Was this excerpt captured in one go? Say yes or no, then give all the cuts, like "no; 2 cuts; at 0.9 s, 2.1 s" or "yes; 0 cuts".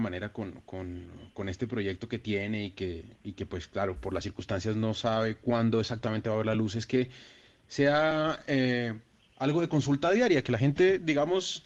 yes; 0 cuts